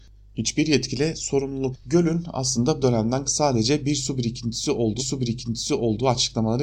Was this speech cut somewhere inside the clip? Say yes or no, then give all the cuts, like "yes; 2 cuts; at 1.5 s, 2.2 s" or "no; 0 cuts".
yes; 4 cuts; at 1.7 s, 2.8 s, 3.2 s, 5.0 s